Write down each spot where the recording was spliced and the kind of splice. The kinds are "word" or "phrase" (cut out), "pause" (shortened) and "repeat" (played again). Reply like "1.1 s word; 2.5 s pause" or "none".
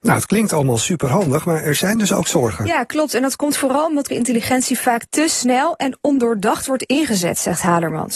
4.1 s word